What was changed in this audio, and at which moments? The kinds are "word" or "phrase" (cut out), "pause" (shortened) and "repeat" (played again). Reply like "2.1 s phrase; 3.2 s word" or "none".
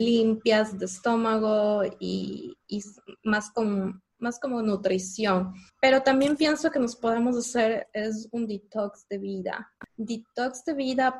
2.6 s pause; 4.1 s pause; 5.7 s pause; 9.9 s pause